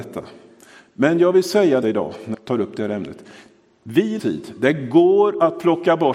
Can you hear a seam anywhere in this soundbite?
yes; 3 cuts; at 1.8 s, 2.3 s, 4.2 s

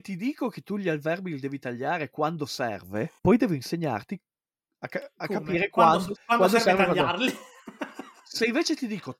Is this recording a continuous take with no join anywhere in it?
no; 2 cuts; at 3.2 s, 6.1 s

